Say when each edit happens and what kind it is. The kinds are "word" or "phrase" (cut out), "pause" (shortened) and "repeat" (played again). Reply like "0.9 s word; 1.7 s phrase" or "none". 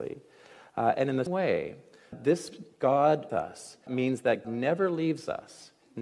1.3 s word; 2.1 s word; 3.3 s word; 3.9 s word; 4.4 s word

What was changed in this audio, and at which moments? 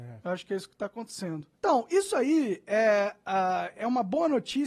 1.5 s pause

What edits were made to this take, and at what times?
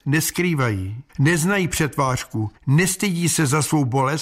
1.1 s pause; 2.6 s pause

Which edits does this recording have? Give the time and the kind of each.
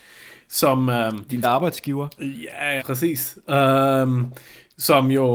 1.4 s word; 2.8 s word

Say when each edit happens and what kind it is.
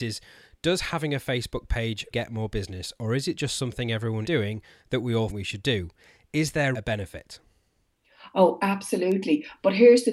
2.1 s word; 4.2 s word; 5.3 s word; 6.7 s word

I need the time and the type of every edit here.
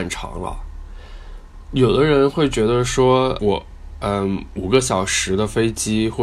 3.4 s word

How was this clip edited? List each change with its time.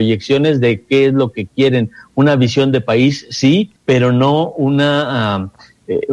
3.8 s pause

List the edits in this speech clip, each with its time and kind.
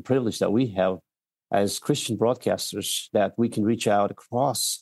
none

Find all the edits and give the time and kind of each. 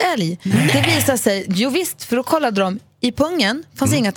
none

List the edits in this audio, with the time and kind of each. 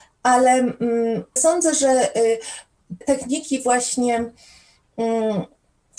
1.4 s word; 3.0 s word

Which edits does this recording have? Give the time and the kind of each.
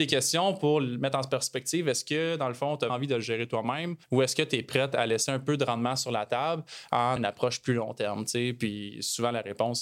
2.9 s word; 4.0 s pause; 7.2 s word

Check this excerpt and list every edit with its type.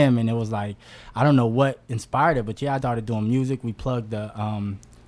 1.9 s pause; 2.8 s word

